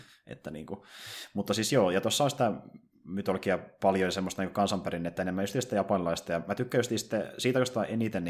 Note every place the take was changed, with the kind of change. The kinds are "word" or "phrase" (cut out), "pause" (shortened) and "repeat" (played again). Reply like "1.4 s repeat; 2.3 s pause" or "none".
none